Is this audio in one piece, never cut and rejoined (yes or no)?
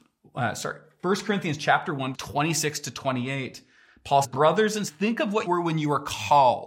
no